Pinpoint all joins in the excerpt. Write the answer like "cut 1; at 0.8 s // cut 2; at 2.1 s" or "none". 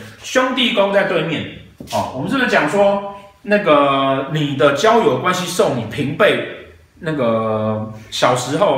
none